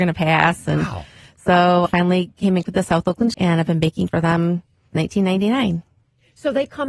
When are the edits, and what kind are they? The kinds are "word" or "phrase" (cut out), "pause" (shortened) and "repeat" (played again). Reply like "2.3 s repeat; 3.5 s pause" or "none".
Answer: 1.9 s word; 2.6 s word; 3.3 s word; 4.1 s word; 4.9 s word

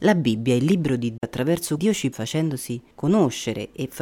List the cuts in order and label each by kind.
1.2 s word; 1.8 s word; 2.1 s word

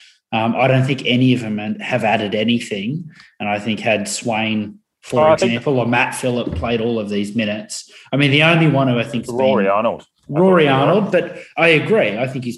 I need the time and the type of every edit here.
none

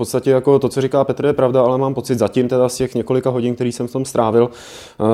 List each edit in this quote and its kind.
none

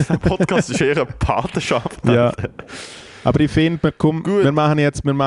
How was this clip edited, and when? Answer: none

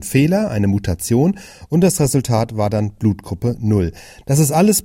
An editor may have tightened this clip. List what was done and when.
none

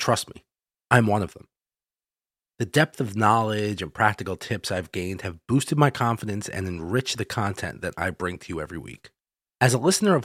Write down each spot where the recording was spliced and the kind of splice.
none

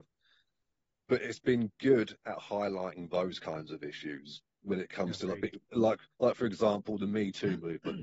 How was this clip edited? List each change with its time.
none

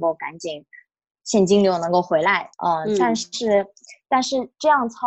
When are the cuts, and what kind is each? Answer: 2.5 s pause

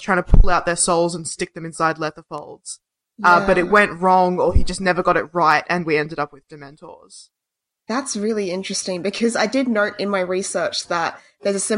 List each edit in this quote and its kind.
none

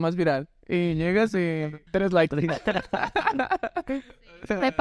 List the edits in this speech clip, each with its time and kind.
1.9 s pause

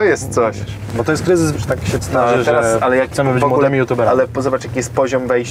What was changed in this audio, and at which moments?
1.5 s phrase; 2.0 s word; 3.1 s word

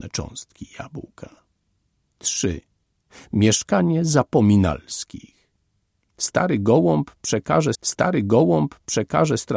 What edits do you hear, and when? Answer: 7.7 s repeat

